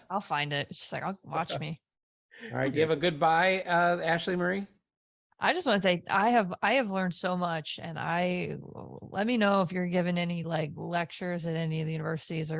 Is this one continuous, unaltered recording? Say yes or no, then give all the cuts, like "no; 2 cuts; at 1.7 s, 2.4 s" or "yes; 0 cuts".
yes; 0 cuts